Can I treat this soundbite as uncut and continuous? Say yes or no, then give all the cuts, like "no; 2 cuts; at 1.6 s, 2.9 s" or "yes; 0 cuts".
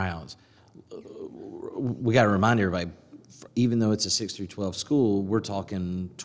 yes; 0 cuts